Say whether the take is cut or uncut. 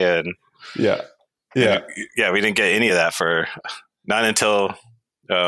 uncut